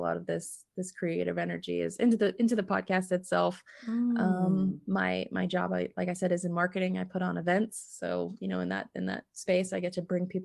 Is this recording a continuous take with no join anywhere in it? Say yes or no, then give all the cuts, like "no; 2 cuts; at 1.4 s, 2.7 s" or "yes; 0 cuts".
yes; 0 cuts